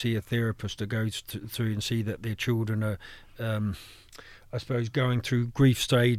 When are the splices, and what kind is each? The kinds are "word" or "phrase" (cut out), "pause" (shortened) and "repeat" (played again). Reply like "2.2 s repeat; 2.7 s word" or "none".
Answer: none